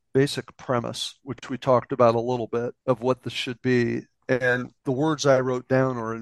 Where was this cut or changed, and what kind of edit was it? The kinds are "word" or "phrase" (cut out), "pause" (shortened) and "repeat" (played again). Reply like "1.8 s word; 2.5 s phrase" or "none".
2.8 s pause; 4.8 s pause